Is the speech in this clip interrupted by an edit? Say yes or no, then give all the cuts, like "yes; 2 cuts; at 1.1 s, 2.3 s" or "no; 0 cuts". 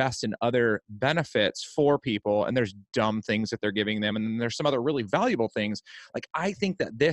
no; 0 cuts